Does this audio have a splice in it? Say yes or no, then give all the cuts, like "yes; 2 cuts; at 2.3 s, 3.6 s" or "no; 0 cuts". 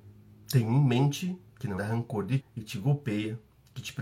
yes; 2 cuts; at 1.8 s, 2.4 s